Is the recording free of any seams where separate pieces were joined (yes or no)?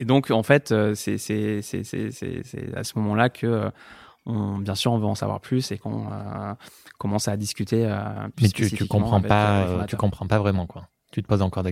yes